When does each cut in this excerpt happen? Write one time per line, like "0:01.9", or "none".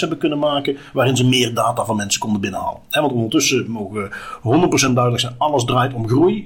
none